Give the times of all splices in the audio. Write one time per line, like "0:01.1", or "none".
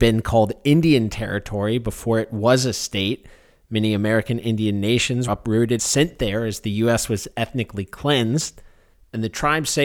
0:05.3
0:05.8